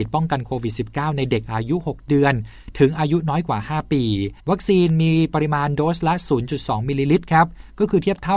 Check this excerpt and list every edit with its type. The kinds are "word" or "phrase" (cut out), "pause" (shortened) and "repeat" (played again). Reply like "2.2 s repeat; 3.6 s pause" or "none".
4.4 s pause